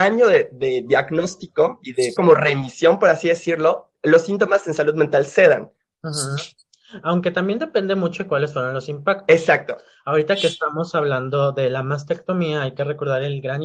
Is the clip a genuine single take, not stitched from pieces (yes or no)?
no